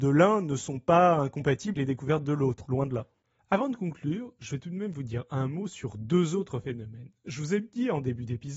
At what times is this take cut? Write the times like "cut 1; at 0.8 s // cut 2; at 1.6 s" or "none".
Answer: cut 1; at 1.7 s // cut 2; at 2.7 s